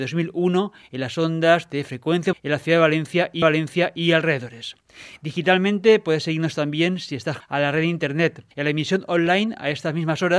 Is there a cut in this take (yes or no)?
yes